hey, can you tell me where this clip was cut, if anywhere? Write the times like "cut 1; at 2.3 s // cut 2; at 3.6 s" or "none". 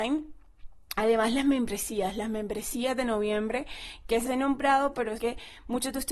cut 1; at 4.3 s // cut 2; at 5.2 s